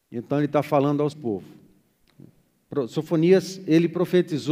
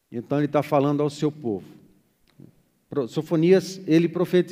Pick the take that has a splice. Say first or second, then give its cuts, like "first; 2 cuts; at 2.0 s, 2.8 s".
first; 1 cut; at 1.1 s